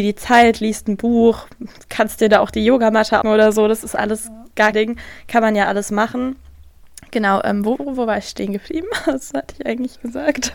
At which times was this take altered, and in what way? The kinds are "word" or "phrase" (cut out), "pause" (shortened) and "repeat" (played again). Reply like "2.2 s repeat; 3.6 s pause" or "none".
3.2 s word; 4.7 s word; 7.8 s word